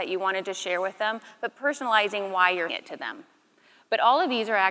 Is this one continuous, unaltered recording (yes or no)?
no